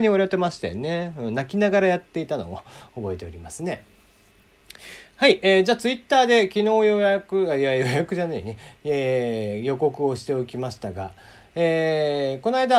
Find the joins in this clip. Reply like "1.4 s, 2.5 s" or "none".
none